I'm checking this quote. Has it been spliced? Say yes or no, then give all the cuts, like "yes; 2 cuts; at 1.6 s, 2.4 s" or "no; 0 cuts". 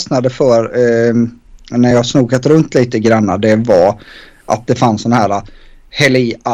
no; 0 cuts